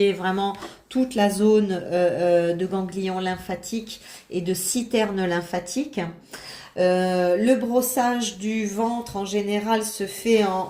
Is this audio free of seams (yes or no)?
yes